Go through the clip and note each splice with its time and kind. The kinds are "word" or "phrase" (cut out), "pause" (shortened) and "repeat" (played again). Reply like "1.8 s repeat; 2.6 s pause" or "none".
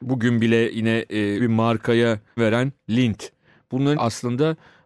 1.4 s word; 2.4 s word; 3.9 s word